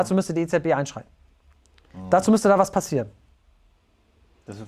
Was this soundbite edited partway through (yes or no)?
no